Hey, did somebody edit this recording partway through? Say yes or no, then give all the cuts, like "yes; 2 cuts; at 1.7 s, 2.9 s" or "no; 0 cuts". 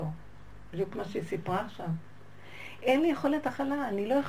no; 0 cuts